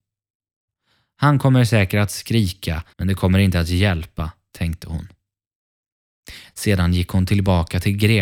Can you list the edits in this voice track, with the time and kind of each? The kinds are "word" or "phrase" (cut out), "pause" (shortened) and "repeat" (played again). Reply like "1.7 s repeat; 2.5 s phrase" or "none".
2.9 s pause